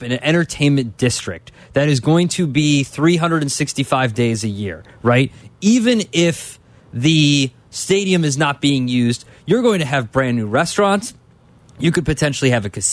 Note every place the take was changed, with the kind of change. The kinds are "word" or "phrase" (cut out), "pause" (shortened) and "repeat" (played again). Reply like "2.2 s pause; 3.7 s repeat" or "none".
none